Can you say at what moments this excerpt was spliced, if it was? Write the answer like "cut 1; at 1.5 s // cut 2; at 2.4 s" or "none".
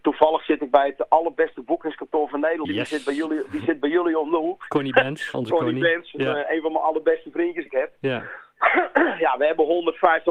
cut 1; at 2.6 s // cut 2; at 5.3 s // cut 3; at 7.7 s